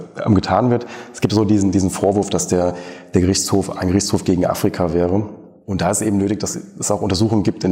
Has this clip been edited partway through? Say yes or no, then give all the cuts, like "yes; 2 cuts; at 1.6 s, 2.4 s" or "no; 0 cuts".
no; 0 cuts